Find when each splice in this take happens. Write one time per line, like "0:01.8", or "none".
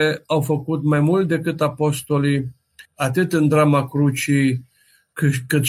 0:02.8